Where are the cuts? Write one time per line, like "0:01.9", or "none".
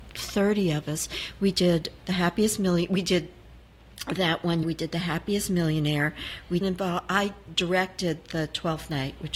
0:02.0
0:04.6
0:06.6